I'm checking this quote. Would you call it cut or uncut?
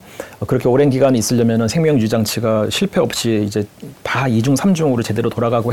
uncut